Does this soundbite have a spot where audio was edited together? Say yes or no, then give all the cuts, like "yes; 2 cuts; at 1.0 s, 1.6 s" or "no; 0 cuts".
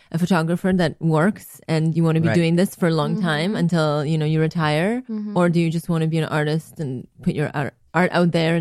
no; 0 cuts